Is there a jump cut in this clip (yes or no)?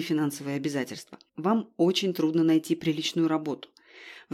yes